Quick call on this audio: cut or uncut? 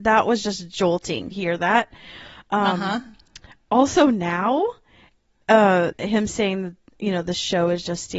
cut